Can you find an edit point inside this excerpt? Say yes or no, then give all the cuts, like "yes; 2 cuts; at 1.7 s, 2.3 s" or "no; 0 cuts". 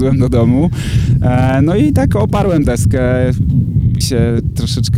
yes; 2 cuts; at 2.6 s, 4.0 s